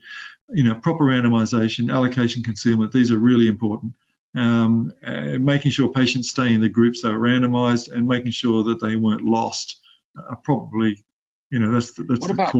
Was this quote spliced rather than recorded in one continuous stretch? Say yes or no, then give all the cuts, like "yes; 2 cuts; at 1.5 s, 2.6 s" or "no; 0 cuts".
no; 0 cuts